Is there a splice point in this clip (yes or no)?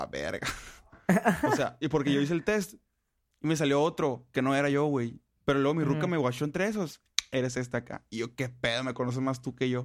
no